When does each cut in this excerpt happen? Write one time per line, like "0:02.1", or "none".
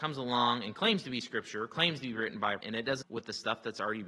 0:02.6
0:03.0